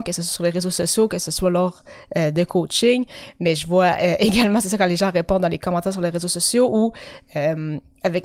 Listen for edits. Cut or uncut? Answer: uncut